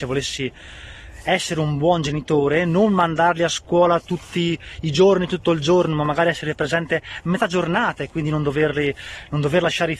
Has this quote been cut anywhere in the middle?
no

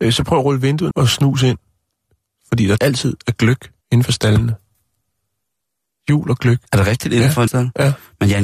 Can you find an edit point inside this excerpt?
yes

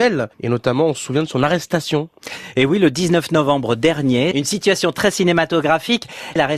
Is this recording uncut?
yes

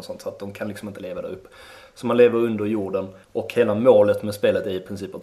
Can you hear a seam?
yes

